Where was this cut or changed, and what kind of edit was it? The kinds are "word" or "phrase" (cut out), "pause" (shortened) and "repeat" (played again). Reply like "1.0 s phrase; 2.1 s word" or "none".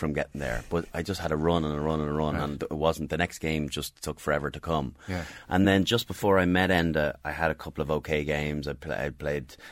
none